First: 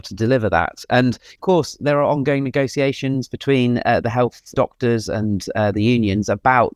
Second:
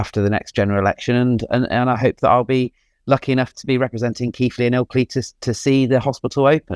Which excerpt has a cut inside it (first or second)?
first